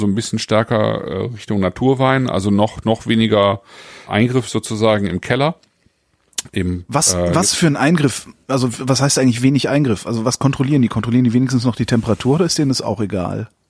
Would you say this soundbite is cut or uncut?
cut